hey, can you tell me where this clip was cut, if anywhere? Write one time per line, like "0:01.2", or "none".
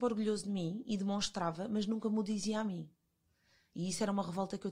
none